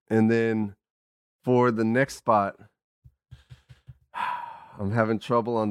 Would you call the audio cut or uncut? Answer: uncut